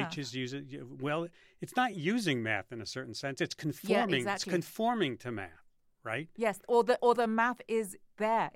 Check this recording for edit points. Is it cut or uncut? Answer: uncut